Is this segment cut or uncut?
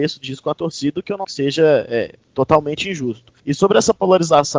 cut